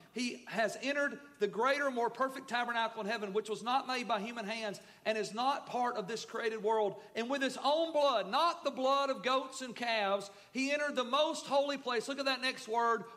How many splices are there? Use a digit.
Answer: 0